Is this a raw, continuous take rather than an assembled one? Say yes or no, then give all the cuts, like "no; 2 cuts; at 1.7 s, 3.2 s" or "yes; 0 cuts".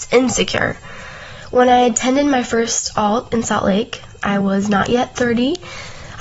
yes; 0 cuts